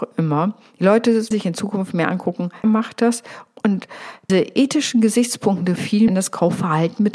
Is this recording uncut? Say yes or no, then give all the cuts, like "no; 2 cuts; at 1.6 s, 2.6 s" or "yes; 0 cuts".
no; 5 cuts; at 1.3 s, 2.6 s, 4.3 s, 5.8 s, 6.1 s